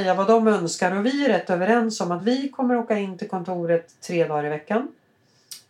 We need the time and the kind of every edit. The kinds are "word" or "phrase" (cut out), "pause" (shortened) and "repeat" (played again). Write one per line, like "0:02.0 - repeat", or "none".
none

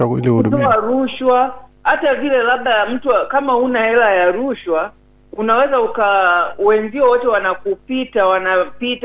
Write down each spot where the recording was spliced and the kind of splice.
none

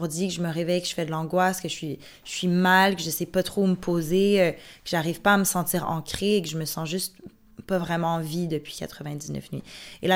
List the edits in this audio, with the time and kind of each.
none

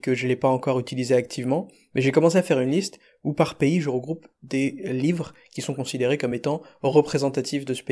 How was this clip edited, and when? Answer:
none

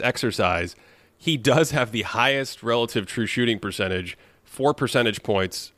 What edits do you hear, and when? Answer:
none

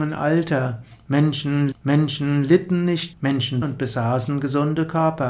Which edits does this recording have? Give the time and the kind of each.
0:01.7 - repeat
0:03.1 - word
0:03.6 - phrase

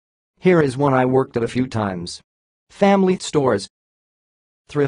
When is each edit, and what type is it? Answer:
0:03.2 - word

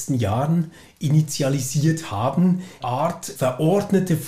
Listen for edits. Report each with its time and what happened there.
0:02.8 - phrase
0:03.4 - word

